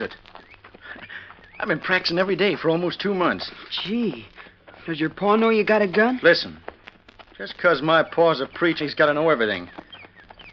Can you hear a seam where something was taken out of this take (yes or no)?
yes